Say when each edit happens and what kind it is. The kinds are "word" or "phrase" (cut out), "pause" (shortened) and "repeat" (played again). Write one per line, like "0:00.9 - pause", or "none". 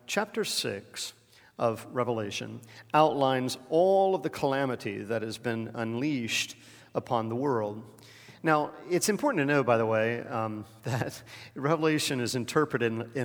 none